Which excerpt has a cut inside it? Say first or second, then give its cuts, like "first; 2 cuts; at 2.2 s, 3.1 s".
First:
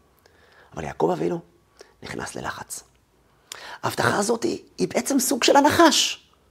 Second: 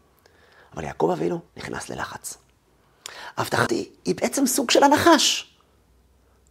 second; 2 cuts; at 1.5 s, 3.7 s